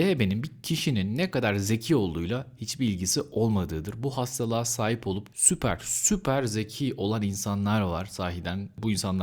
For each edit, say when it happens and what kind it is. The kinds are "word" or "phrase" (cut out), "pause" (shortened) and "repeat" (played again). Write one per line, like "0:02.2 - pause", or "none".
none